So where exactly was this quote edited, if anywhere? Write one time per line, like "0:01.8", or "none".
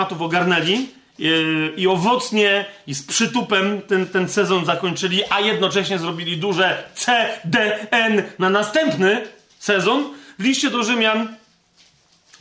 none

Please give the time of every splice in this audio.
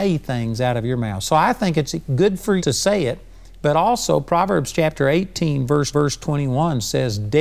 0:02.6
0:05.9

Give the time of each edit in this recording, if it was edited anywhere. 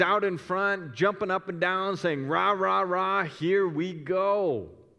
none

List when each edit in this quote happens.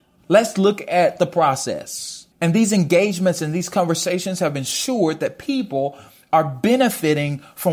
0:02.3

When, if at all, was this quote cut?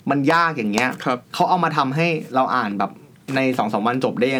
0:01.2

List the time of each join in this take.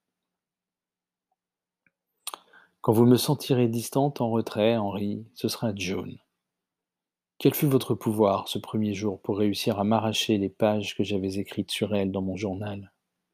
none

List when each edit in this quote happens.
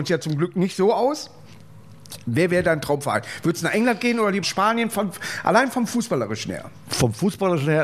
0:04.4

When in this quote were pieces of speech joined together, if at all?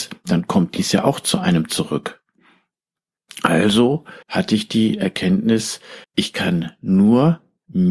0:04.2
0:06.0

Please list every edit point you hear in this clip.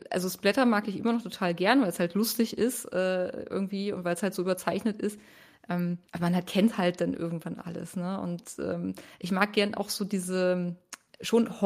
0:06.1

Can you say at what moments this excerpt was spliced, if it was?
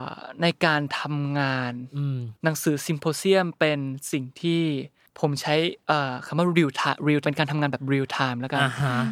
0:02.4
0:05.1
0:07.2

